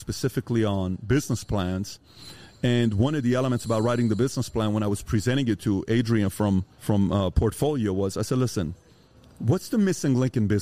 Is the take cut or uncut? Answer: uncut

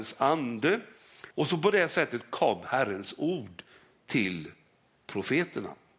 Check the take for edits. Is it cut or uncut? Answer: cut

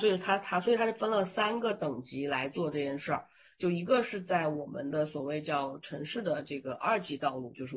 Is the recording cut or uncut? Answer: uncut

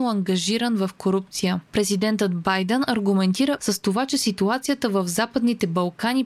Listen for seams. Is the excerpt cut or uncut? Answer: cut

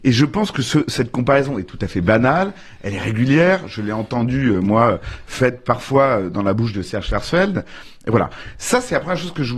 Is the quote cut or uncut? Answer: uncut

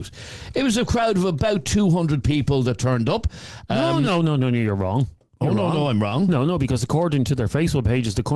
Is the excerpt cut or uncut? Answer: uncut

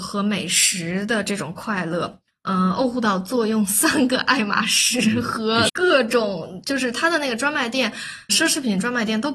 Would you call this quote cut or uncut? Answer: cut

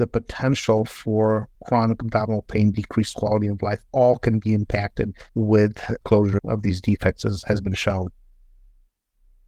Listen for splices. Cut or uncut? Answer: cut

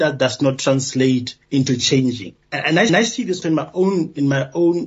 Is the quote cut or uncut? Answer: cut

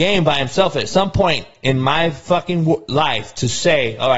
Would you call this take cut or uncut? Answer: uncut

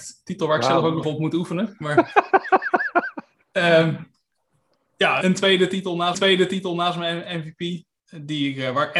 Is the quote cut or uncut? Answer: cut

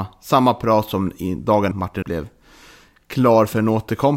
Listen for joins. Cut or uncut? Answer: cut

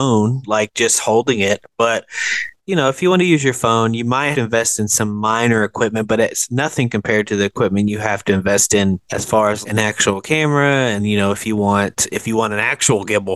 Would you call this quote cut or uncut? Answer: cut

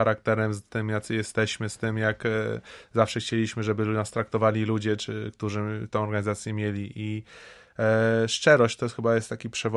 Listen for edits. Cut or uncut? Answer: uncut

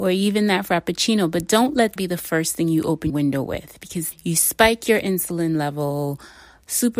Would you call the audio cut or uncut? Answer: cut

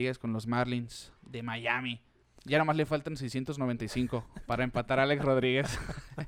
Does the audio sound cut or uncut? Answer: cut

